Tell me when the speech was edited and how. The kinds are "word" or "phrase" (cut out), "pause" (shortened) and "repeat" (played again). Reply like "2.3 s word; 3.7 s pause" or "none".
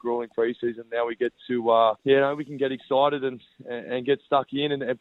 2.0 s pause